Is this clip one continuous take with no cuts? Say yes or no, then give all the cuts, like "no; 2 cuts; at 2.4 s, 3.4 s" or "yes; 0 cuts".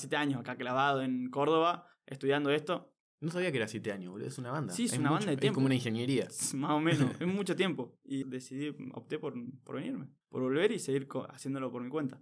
no; 3 cuts; at 3.0 s, 8.2 s, 10.2 s